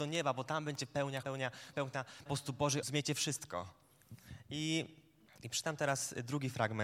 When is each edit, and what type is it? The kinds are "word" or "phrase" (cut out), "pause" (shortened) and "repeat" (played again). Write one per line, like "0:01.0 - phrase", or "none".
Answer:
0:01.2 - word
0:01.7 - word
0:02.3 - word
0:02.8 - phrase
0:05.3 - pause